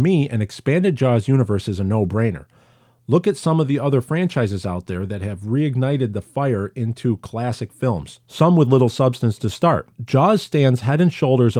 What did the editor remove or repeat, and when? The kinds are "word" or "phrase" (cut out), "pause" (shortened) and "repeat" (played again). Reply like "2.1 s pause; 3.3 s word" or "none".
none